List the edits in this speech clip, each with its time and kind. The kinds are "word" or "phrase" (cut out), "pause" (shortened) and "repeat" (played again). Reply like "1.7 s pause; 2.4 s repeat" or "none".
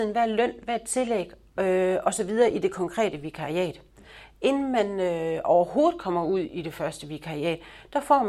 none